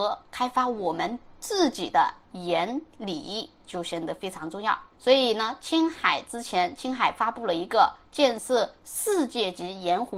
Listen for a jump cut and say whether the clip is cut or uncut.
cut